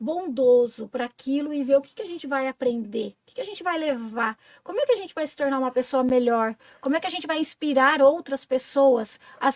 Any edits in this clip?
no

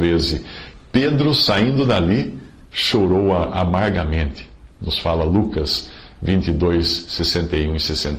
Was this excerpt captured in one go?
no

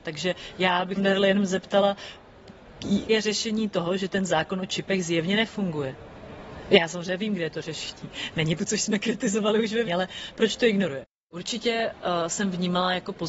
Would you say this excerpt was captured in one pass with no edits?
no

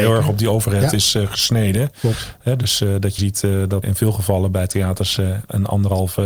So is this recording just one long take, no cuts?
no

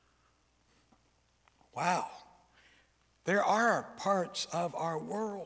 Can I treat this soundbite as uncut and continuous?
yes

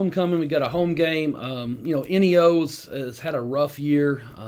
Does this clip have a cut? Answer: no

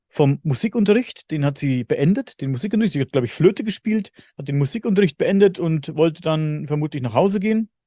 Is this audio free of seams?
yes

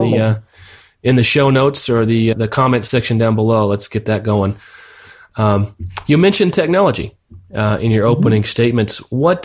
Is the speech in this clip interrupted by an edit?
yes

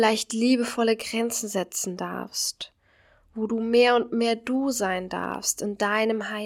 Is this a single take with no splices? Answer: yes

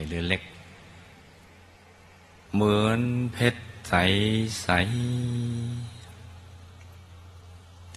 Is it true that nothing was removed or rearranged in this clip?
yes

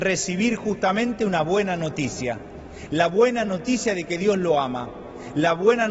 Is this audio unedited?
yes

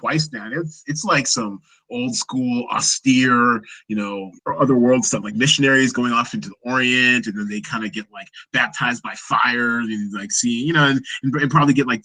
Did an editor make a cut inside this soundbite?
yes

